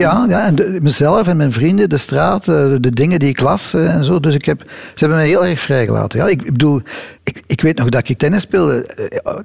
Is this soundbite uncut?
no; 2 cuts; at 7.2 s, 8.2 s

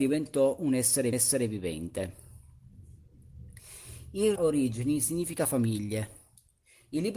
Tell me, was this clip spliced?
yes; 2 cuts; at 1.1 s, 4.4 s

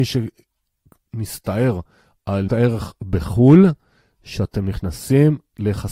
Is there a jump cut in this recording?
yes; 2 cuts; at 2.5 s, 4.1 s

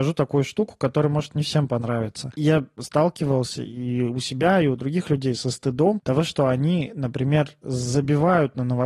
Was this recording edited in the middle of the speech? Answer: no; 0 cuts

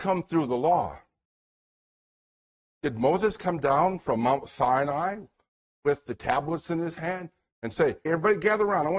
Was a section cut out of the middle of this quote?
yes; 1 cut; at 8.1 s

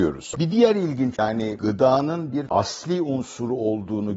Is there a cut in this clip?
yes; 3 cuts; at 1.2 s, 1.6 s, 2.5 s

